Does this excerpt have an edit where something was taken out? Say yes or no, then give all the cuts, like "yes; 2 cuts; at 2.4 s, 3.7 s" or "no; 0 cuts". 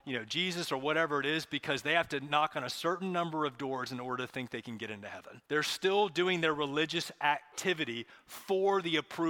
yes; 1 cut; at 5.5 s